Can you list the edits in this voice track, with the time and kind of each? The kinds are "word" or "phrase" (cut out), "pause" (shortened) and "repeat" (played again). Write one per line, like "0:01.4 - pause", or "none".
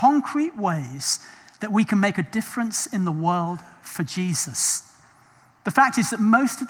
none

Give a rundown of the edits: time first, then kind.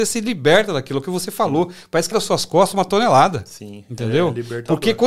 0:02.1 - phrase

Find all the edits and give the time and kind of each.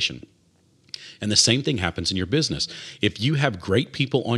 none

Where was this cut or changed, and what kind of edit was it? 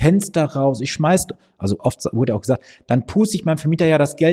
none

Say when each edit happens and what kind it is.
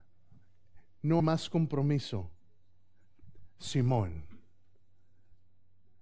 0:01.2 - word

